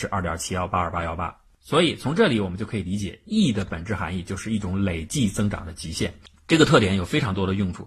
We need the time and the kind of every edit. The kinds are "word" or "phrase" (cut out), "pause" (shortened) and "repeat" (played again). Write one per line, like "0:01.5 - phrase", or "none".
none